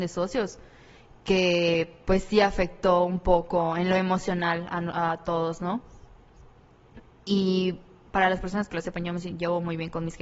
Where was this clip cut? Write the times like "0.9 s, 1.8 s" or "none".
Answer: none

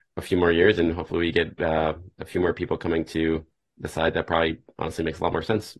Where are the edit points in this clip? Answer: none

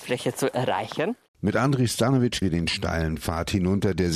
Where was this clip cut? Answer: 2.4 s

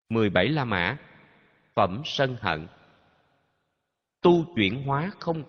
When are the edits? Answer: none

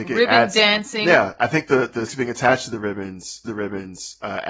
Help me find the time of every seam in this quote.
2.1 s, 3.4 s

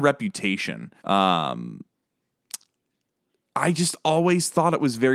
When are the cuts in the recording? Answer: 1.0 s

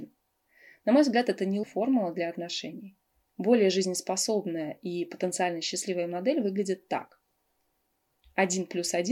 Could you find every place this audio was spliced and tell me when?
1.6 s

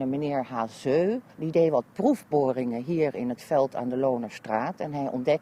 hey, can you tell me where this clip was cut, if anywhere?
1.3 s

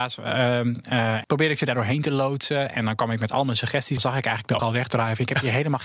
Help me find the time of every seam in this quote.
1.2 s, 4.0 s, 4.6 s

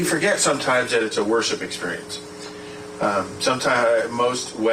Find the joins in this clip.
none

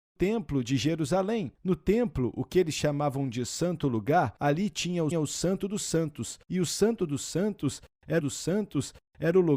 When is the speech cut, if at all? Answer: 5.1 s, 8.2 s

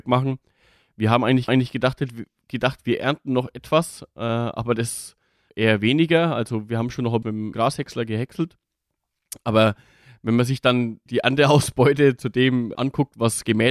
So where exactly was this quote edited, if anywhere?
1.5 s, 5.5 s, 7.2 s, 7.5 s, 11.1 s, 12.7 s

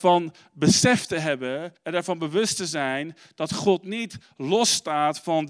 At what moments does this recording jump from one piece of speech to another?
1.8 s

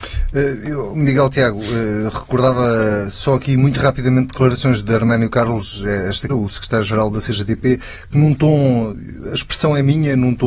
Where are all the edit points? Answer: 6.3 s

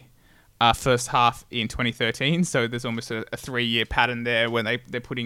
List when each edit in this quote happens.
none

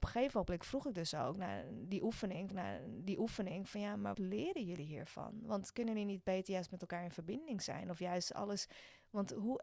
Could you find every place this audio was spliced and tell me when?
2.5 s, 4.1 s

